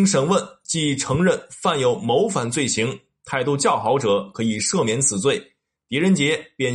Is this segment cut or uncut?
uncut